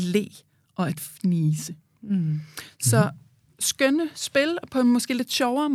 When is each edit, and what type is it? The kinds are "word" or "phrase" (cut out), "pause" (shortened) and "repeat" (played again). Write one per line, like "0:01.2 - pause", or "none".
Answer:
none